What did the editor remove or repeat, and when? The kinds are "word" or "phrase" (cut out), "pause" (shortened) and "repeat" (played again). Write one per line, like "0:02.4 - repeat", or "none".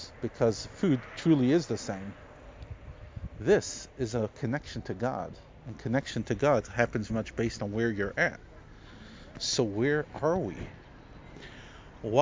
0:07.1 - word